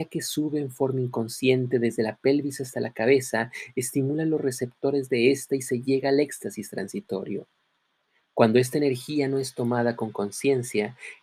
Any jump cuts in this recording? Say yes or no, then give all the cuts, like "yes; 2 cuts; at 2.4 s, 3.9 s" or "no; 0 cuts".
no; 0 cuts